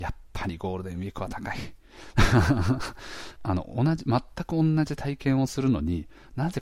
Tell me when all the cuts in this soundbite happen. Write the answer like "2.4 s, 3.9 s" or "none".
3.4 s